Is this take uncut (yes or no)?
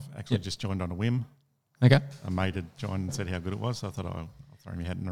yes